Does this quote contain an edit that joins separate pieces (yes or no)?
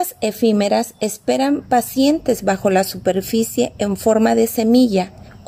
no